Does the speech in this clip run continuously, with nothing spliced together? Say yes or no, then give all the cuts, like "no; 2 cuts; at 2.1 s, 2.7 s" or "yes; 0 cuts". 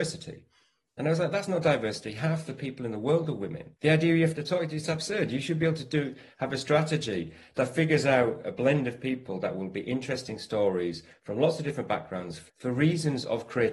no; 2 cuts; at 3.8 s, 12.5 s